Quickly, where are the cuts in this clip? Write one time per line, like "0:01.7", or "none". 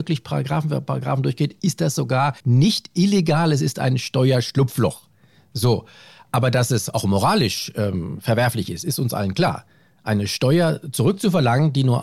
0:02.4